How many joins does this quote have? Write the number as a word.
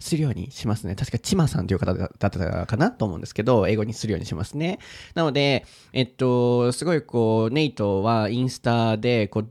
zero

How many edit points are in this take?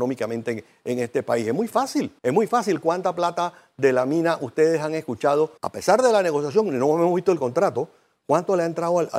two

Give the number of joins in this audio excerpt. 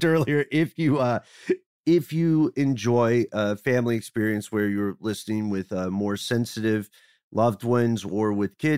zero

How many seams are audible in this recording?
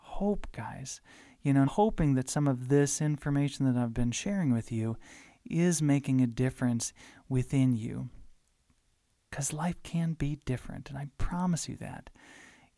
one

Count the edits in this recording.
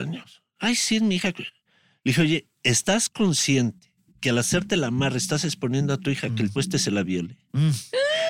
one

